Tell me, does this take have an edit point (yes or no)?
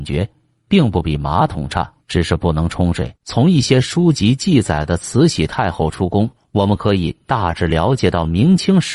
yes